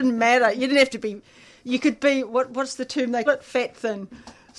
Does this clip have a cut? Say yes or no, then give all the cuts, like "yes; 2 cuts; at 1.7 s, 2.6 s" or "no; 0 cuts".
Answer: yes; 1 cut; at 3.3 s